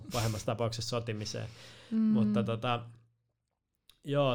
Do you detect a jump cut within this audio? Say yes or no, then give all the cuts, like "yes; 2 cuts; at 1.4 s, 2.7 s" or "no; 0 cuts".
no; 0 cuts